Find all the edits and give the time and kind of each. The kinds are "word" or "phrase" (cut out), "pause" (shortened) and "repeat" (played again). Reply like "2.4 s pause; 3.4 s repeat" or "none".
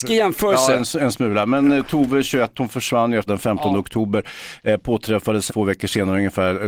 3.3 s phrase; 5.5 s word